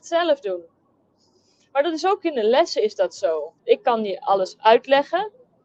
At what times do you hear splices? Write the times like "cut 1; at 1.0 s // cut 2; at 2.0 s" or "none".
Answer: cut 1; at 3.6 s